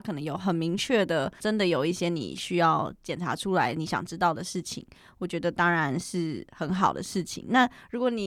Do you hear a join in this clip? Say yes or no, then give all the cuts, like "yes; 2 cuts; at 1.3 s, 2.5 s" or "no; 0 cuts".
yes; 1 cut; at 1.4 s